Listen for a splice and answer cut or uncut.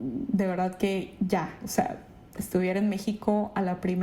uncut